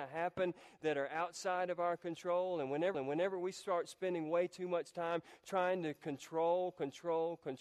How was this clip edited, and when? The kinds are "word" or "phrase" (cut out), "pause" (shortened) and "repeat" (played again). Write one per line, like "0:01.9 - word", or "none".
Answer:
0:02.9 - repeat